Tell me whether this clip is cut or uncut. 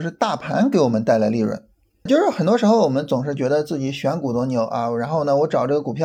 cut